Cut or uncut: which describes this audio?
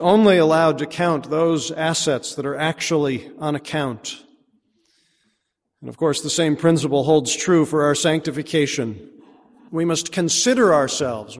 uncut